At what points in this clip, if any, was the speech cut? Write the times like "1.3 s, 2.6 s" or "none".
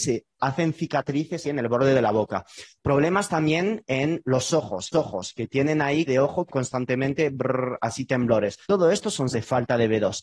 1.4 s, 4.9 s, 6.1 s, 6.5 s, 8.6 s, 9.3 s